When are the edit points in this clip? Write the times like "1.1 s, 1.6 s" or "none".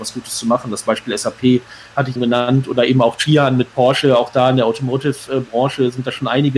2.2 s

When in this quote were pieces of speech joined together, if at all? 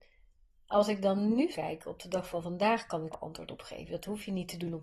1.5 s, 3.1 s

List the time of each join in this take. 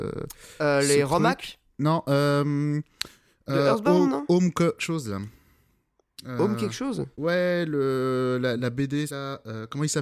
4.8 s, 7.1 s, 8.6 s, 9.1 s

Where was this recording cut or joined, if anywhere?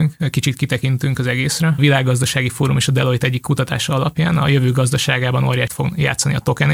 1.8 s, 5.7 s

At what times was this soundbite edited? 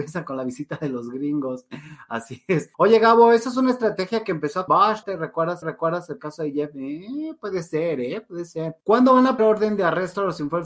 2.7 s, 4.7 s, 5.0 s, 5.6 s, 8.8 s, 9.4 s

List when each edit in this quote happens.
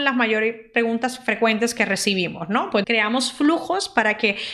2.8 s

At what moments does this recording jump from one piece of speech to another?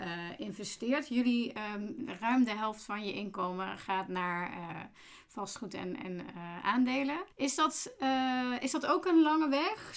7.3 s

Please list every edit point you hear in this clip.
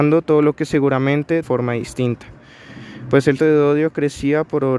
1.4 s, 3.4 s

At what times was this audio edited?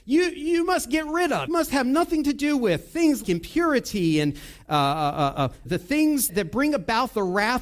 1.5 s, 3.2 s, 5.7 s, 6.3 s

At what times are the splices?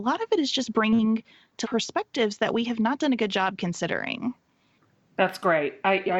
1.6 s

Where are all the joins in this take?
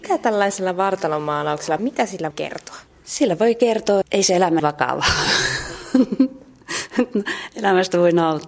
1.8 s, 2.3 s, 4.0 s, 4.6 s

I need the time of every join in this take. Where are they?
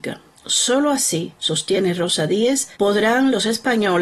2.7 s

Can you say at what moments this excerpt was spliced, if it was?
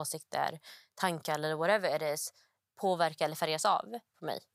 none

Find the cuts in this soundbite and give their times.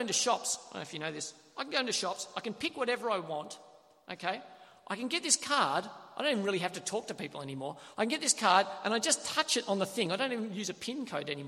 none

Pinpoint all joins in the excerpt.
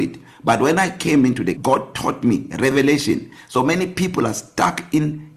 1.6 s

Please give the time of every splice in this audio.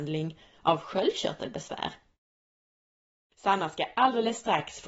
none

